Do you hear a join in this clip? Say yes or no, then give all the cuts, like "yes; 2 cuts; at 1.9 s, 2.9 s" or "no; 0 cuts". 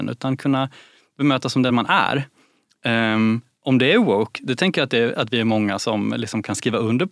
no; 0 cuts